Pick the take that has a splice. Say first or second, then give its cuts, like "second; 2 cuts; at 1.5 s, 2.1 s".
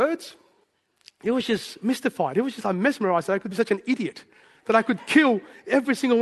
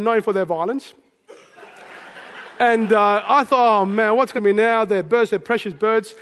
second; 1 cut; at 4.4 s